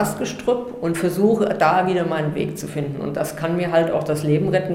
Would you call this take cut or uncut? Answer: uncut